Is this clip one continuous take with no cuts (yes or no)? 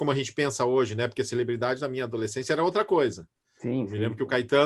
yes